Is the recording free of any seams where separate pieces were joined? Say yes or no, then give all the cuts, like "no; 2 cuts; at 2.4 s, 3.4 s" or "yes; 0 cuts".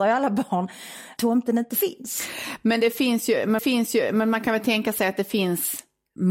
no; 2 cuts; at 1.2 s, 3.6 s